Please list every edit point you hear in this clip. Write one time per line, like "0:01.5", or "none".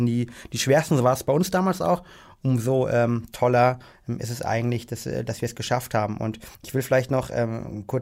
0:06.5